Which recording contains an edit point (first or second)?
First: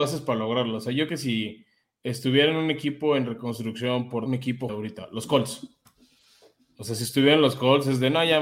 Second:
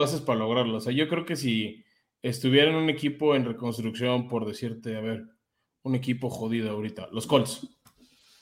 first